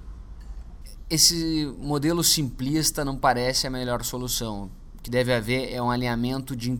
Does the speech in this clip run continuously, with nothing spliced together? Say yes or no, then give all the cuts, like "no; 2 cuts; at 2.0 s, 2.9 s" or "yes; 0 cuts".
yes; 0 cuts